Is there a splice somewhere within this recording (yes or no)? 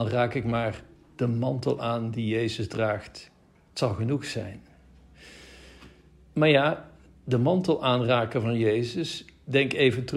no